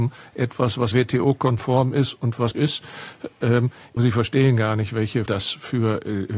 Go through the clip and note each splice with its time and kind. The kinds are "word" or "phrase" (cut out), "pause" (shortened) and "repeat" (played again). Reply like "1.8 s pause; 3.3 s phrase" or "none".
0.9 s word; 2.5 s word; 4.0 s word; 5.3 s word